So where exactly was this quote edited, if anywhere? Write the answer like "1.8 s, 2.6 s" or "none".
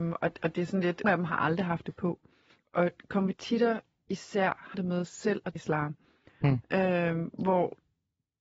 1.0 s, 4.7 s, 5.6 s

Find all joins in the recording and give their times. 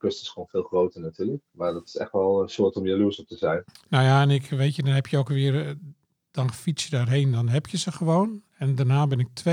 none

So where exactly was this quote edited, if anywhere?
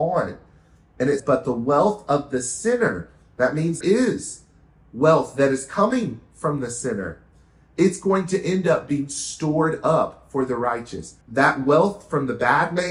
1.2 s, 3.8 s, 11.2 s

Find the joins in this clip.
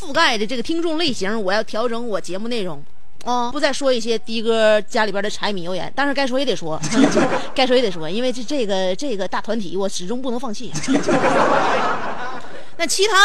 3.5 s

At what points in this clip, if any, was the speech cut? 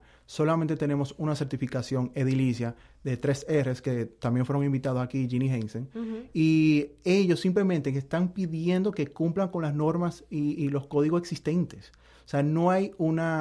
none

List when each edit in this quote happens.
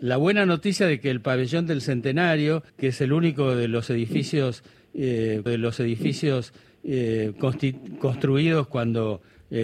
2.7 s, 5.5 s

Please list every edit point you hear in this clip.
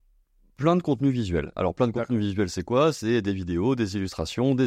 none

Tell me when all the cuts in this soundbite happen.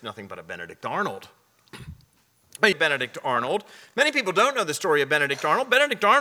2.7 s

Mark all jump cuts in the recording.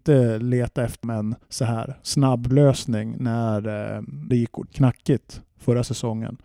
1.0 s, 1.4 s, 2.5 s, 4.3 s, 4.7 s

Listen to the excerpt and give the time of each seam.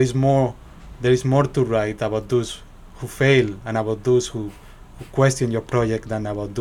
none

